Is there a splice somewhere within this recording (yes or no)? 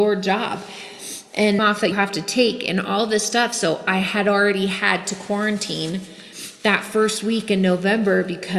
yes